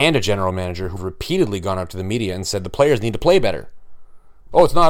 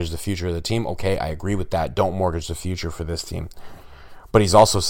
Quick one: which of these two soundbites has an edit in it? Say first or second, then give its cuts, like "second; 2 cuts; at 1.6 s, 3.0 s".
first; 1 cut; at 1.0 s